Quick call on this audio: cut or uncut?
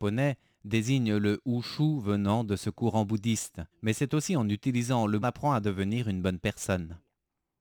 cut